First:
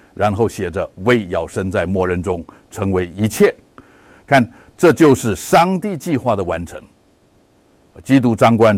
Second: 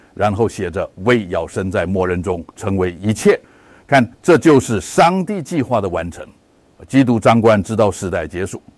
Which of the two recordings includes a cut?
second; 4 cuts; at 2.5 s, 3.4 s, 4.1 s, 6.4 s

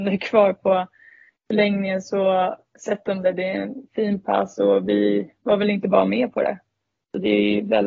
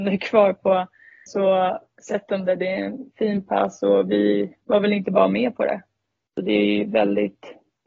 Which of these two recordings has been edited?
second; 1 cut; at 1.3 s

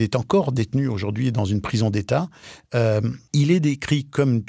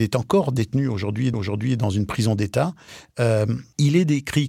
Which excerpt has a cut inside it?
second; 1 cut; at 1.3 s

